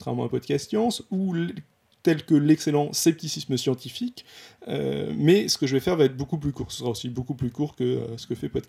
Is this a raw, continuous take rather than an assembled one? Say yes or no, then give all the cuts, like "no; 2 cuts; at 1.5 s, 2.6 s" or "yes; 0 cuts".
yes; 0 cuts